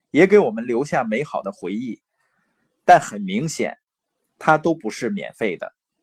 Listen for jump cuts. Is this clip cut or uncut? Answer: uncut